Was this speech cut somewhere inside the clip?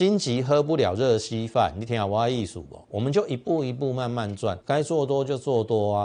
yes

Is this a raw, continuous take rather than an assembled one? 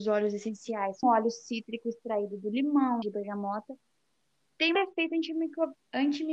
no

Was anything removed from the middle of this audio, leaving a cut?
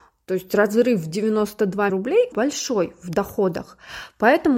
yes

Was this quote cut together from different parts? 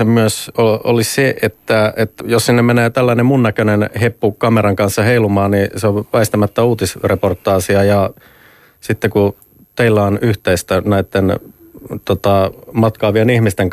yes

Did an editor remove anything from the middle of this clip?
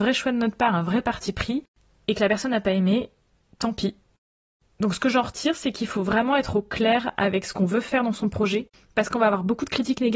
no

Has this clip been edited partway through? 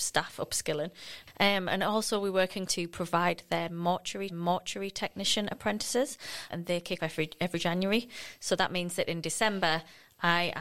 yes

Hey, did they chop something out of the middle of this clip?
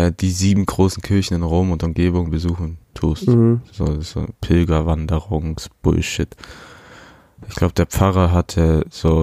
yes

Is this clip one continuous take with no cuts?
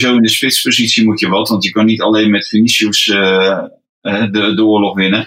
yes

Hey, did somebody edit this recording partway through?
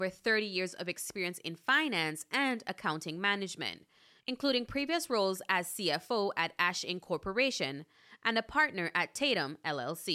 no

